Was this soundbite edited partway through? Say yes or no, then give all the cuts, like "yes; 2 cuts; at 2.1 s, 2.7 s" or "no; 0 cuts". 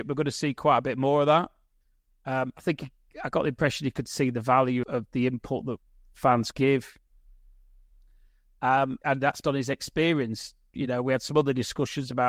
yes; 4 cuts; at 4.8 s, 6.5 s, 9.0 s, 9.4 s